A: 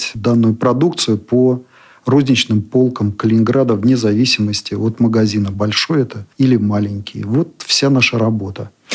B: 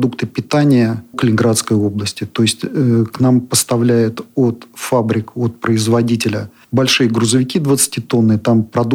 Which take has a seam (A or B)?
B